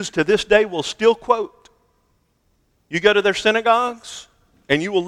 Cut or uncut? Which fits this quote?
uncut